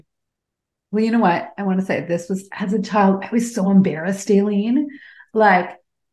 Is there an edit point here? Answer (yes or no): no